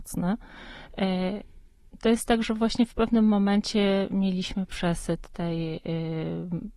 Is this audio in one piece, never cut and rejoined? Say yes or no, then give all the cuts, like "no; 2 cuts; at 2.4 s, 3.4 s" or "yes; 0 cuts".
yes; 0 cuts